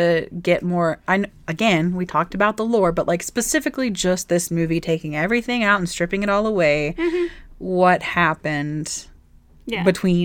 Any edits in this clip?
no; 0 cuts

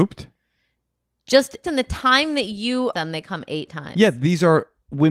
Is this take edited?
yes; 2 cuts; at 1.6 s, 2.9 s

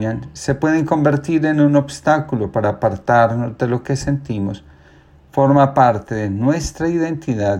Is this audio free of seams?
yes; 0 cuts

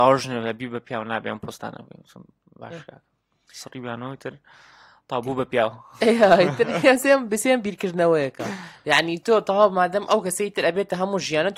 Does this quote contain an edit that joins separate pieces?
no; 0 cuts

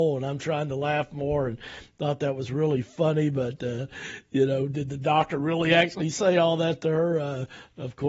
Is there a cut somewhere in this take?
no; 0 cuts

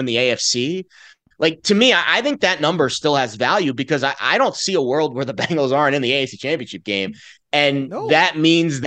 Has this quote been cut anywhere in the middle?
no; 0 cuts

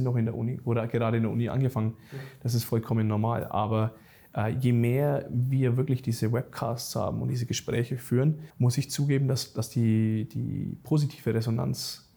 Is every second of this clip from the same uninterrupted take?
no; 1 cut; at 8.5 s

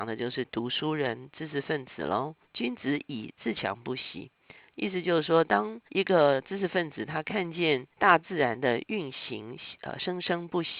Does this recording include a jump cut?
yes; 3 cuts; at 2.4 s, 5.9 s, 7.9 s

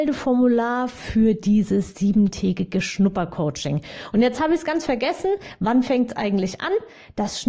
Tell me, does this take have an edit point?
no; 0 cuts

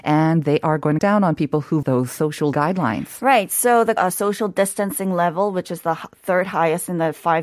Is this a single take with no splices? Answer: no; 4 cuts; at 1.0 s, 1.8 s, 2.5 s, 4.0 s

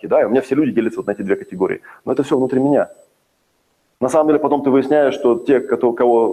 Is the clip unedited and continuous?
yes; 0 cuts

